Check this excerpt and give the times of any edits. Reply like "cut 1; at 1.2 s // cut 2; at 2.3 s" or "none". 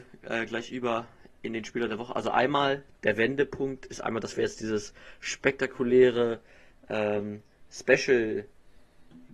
none